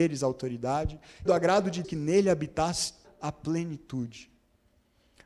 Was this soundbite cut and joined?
yes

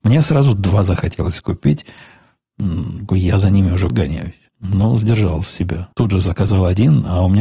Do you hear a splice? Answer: yes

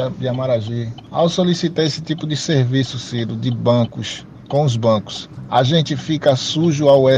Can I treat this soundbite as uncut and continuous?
yes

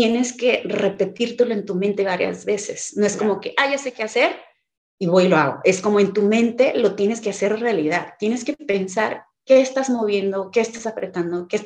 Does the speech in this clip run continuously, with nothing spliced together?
yes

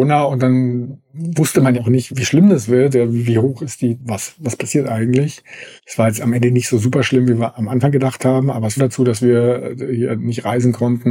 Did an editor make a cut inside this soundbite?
yes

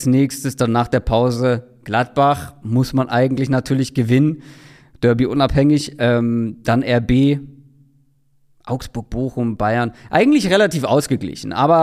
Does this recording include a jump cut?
no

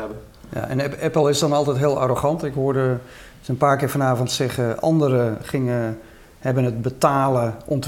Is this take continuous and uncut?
yes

